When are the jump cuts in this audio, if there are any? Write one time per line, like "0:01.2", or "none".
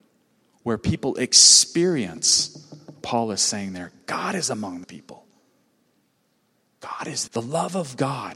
0:03.0
0:04.8
0:07.3